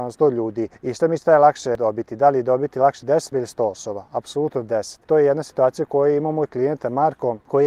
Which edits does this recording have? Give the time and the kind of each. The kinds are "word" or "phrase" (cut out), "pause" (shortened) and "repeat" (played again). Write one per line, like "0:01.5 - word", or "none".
0:01.3 - word
0:03.3 - word